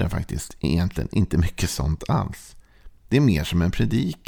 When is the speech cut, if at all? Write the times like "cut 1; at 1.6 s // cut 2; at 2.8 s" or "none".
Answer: none